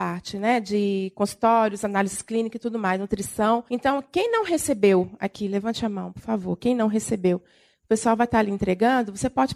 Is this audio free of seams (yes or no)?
no